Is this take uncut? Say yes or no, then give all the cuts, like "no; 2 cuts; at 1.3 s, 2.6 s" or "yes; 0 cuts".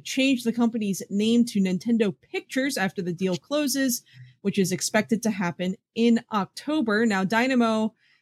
yes; 0 cuts